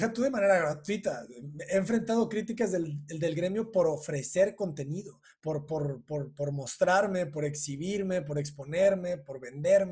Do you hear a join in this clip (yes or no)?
no